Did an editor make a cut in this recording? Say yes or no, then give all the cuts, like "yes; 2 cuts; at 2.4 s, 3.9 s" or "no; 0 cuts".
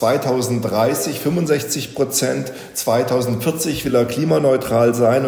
no; 0 cuts